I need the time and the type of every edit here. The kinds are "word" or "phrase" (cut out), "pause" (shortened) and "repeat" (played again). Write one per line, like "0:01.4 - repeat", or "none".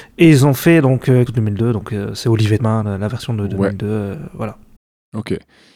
0:01.3 - phrase
0:02.6 - word